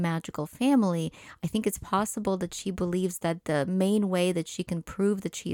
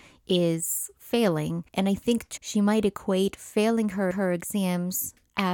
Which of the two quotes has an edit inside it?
second; 3 cuts; at 1.7 s, 2.4 s, 4.1 s

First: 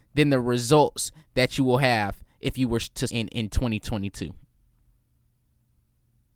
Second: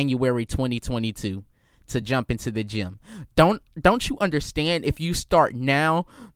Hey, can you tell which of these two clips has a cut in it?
first; 1 cut; at 3.1 s

